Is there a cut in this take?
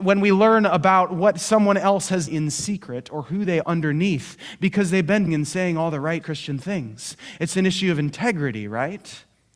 yes; 4 cuts; at 2.3 s, 3.6 s, 5.3 s, 6.2 s

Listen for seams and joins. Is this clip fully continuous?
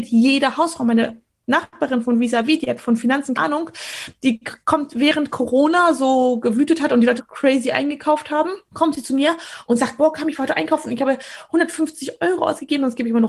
no; 3 cuts; at 3.4 s, 7.2 s, 8.7 s

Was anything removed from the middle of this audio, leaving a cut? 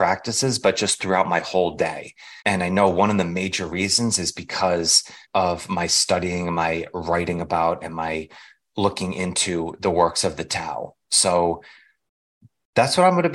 yes; 3 cuts; at 2.4 s, 5.2 s, 11.0 s

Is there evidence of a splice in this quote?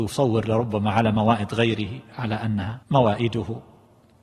yes; 1 cut; at 2.8 s

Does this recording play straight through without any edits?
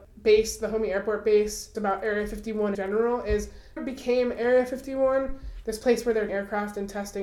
no; 4 cuts; at 1.7 s, 2.7 s, 3.8 s, 6.3 s

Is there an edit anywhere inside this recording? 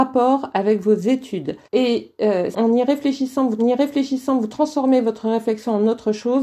yes; 3 cuts; at 1.6 s, 2.5 s, 3.6 s

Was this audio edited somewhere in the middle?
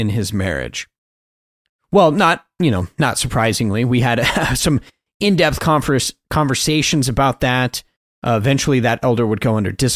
no; 0 cuts

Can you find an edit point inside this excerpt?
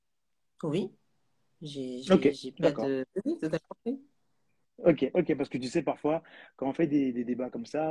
no; 0 cuts

